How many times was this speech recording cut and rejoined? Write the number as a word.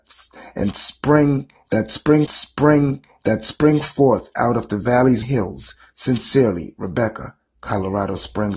two